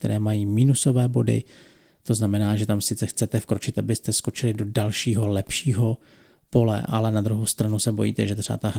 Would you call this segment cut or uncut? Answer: uncut